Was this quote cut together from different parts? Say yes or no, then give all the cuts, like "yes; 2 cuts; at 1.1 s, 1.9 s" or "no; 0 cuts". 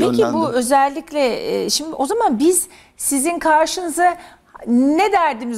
no; 0 cuts